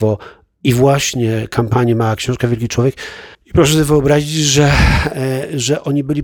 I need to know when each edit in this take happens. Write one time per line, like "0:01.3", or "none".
0:03.3